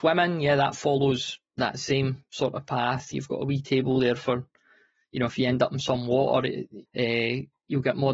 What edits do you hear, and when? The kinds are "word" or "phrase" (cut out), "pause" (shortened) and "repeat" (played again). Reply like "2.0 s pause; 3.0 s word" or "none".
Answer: 6.8 s word

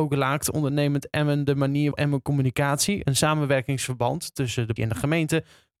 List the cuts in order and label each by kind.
1.9 s word; 4.8 s word

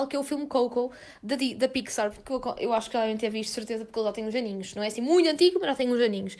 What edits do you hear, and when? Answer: none

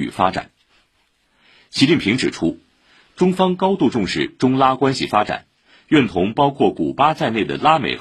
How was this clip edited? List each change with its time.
none

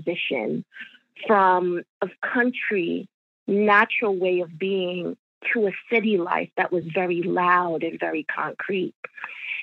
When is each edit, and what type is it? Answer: none

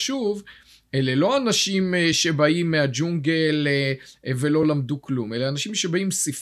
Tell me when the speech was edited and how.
none

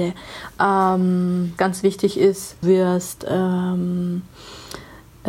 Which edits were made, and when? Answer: 1.6 s word; 2.6 s word

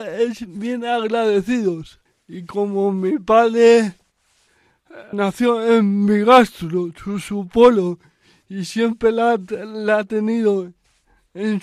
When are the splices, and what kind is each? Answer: 2.1 s pause; 5.1 s word

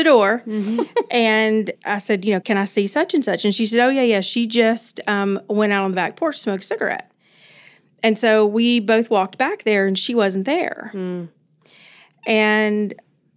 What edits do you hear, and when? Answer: none

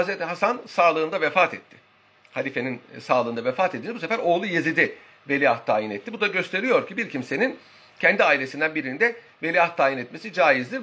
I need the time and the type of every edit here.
none

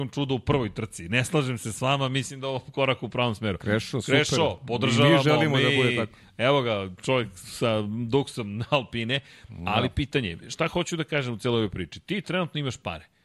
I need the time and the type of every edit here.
none

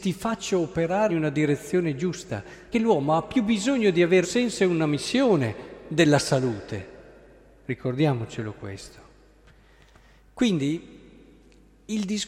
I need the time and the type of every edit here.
1.1 s word; 2.7 s word; 4.2 s word

